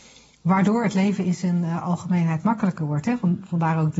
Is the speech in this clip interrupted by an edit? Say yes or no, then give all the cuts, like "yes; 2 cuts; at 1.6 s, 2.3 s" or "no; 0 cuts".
no; 0 cuts